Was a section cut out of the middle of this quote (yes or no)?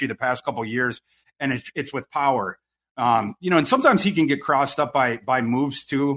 no